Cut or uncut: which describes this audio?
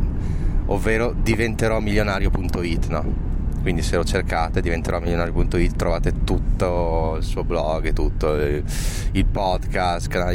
uncut